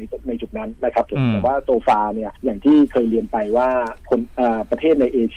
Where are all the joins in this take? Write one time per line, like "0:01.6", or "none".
0:02.4